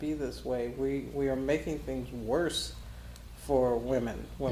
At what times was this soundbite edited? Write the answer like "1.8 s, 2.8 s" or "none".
none